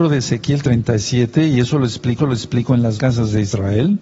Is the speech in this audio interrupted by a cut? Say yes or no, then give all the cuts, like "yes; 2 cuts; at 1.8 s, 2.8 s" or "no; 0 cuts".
yes; 2 cuts; at 2.2 s, 3.0 s